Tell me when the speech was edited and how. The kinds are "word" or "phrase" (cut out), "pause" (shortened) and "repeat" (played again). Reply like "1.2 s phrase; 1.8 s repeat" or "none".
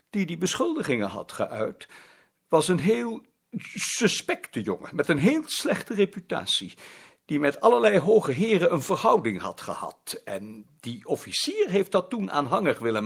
none